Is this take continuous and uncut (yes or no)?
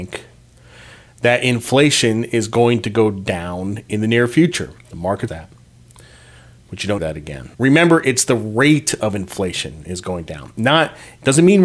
no